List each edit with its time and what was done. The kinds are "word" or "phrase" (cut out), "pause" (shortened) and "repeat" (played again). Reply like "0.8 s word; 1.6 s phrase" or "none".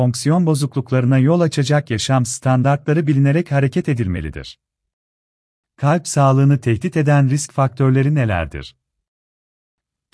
none